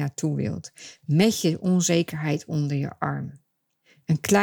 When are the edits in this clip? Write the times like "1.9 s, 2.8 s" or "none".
none